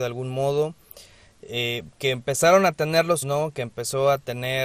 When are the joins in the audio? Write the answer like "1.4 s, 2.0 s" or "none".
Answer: 3.2 s